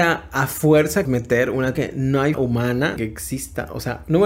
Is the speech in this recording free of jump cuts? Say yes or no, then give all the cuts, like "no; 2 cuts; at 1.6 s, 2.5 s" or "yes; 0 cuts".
no; 4 cuts; at 1.0 s, 1.7 s, 2.3 s, 3.0 s